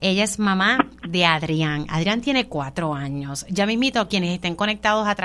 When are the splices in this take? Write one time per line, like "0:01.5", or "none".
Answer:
0:01.0